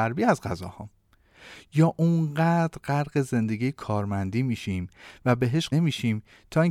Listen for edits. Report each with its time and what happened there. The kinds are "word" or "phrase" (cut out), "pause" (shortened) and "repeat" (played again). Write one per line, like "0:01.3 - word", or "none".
0:05.7 - word